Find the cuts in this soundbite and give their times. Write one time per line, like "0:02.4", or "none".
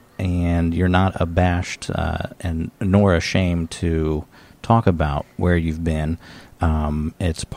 none